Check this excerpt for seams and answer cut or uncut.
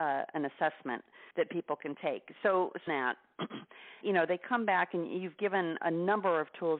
cut